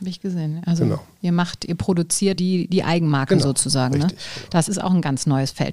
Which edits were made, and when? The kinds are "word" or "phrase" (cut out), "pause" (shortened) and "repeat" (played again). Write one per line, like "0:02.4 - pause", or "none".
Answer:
0:02.4 - word
0:04.7 - word